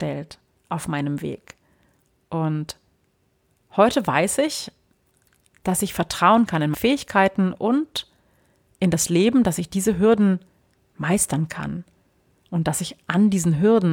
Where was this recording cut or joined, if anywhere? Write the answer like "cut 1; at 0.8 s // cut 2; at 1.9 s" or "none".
cut 1; at 6.7 s